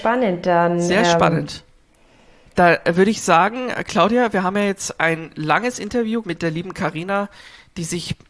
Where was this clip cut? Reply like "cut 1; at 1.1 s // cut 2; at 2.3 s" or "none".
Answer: cut 1; at 6.2 s

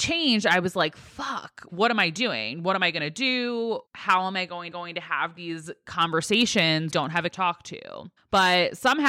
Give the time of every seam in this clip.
cut 1; at 1.7 s // cut 2; at 3.9 s // cut 3; at 4.7 s // cut 4; at 6.9 s // cut 5; at 7.3 s // cut 6; at 8.2 s

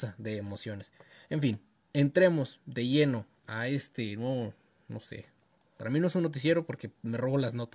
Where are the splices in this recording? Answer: none

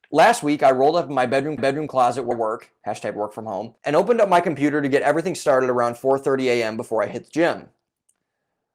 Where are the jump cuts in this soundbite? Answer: cut 1; at 1.6 s // cut 2; at 2.3 s // cut 3; at 3.8 s

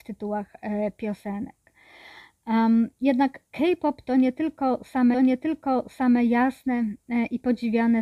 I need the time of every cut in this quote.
cut 1; at 3.5 s // cut 2; at 5.1 s

